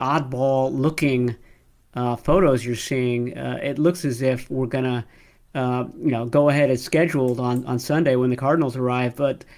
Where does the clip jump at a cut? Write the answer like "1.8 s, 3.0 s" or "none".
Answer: none